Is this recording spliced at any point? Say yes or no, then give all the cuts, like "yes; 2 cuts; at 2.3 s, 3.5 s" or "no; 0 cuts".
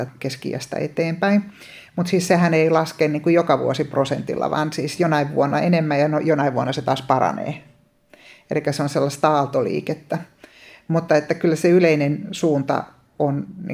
no; 0 cuts